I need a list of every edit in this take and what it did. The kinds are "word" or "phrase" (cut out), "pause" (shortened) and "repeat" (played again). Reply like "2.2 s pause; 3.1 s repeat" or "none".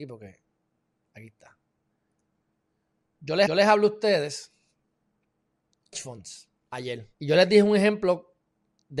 3.5 s repeat; 5.9 s phrase; 7.1 s pause

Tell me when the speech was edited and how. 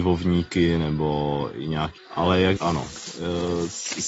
2.0 s phrase; 2.6 s word

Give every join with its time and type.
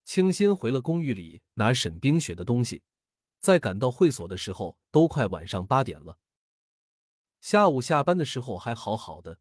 none

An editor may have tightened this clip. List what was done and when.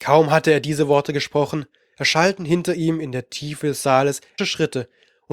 4.4 s word

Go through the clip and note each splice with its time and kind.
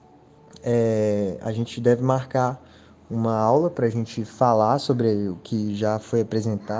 none

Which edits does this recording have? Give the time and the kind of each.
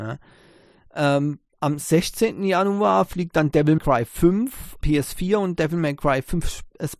3.8 s word; 4.8 s word

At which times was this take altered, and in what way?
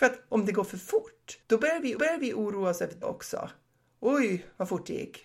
1.4 s pause; 2.0 s repeat; 3.0 s word

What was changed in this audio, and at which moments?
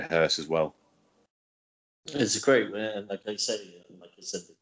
none

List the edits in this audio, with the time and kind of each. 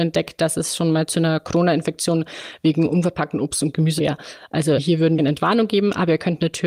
4.0 s word; 4.8 s word; 5.2 s phrase

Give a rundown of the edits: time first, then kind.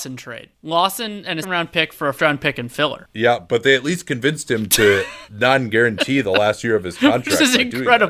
1.4 s word; 2.2 s word; 5.3 s word

